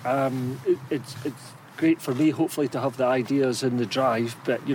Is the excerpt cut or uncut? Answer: uncut